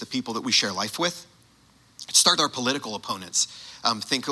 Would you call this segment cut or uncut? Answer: cut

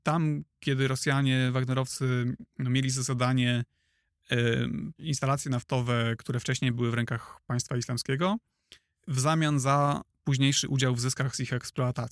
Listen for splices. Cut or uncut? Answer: cut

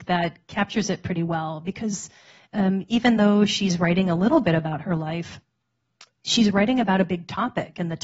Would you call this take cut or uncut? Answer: uncut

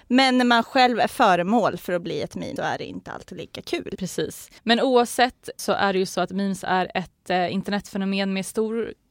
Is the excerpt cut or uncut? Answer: cut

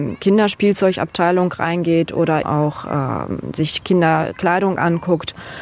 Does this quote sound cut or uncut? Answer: cut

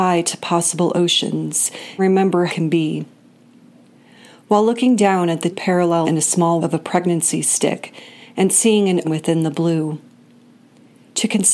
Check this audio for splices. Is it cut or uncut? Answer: cut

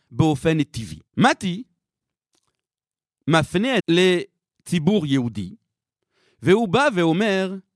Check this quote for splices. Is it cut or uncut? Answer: cut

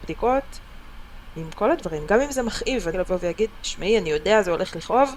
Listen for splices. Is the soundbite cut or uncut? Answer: cut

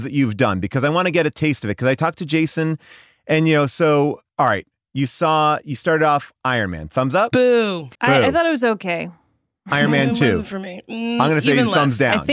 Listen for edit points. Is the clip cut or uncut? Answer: cut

